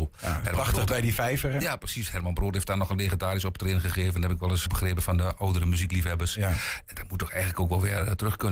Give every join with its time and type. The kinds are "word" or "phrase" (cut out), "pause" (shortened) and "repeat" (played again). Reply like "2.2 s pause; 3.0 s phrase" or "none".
4.7 s word; 6.9 s phrase